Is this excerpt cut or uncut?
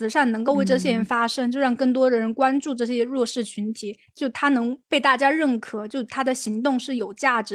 cut